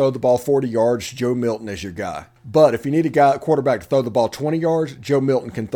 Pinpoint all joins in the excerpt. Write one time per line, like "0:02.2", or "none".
0:02.4